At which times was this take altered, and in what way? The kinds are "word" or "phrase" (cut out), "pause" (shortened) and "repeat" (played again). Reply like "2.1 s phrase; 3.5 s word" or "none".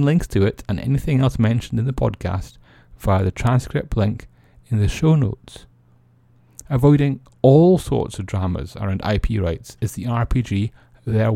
none